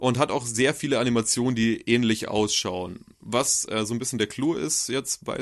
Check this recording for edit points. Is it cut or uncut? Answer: uncut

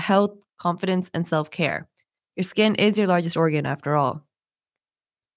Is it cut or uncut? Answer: uncut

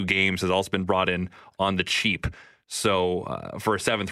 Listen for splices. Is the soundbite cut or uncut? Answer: uncut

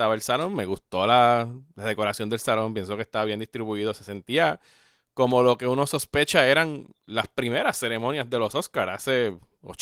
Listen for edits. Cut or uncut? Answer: uncut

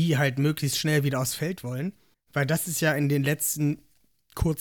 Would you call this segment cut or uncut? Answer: cut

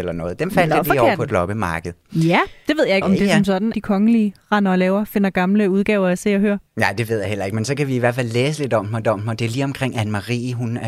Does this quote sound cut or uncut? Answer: cut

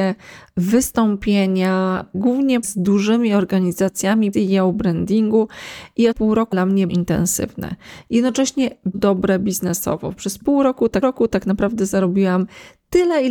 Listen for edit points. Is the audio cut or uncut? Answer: cut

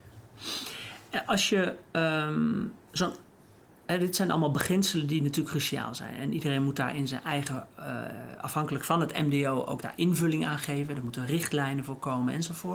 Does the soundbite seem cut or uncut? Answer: uncut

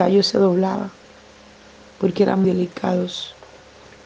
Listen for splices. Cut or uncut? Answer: cut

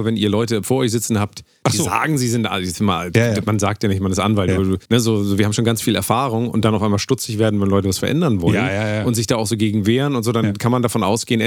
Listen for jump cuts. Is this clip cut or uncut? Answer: cut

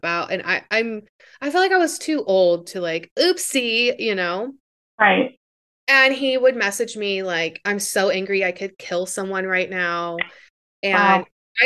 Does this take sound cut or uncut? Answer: uncut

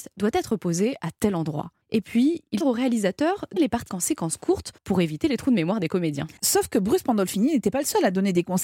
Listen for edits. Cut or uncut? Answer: cut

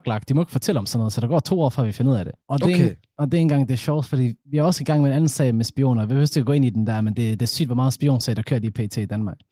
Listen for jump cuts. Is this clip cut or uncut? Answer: cut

